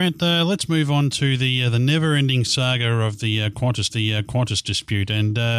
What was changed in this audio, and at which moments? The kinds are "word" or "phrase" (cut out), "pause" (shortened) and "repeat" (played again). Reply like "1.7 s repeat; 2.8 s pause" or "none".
3.9 s repeat